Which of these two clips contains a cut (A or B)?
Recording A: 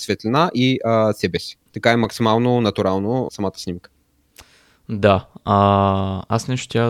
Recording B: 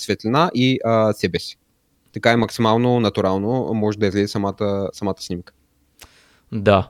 A